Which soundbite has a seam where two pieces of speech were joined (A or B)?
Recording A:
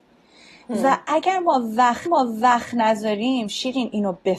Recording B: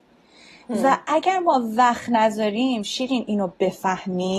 A